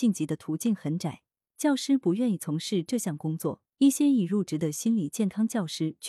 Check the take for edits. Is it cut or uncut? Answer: cut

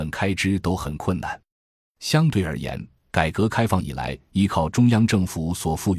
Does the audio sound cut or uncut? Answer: uncut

